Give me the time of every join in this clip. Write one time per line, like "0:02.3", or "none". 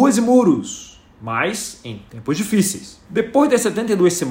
0:03.0